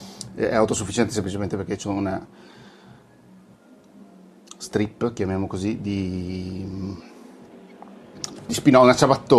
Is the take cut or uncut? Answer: cut